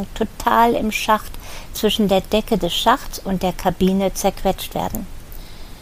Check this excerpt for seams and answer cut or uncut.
uncut